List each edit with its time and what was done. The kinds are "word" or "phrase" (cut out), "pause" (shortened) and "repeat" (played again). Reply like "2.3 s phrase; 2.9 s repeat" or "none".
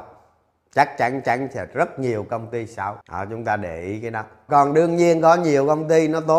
1.2 s repeat; 3.0 s pause; 4.5 s word